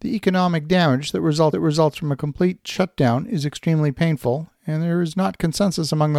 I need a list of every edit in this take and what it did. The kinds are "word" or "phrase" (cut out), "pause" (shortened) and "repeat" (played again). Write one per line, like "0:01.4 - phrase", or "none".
0:01.5 - repeat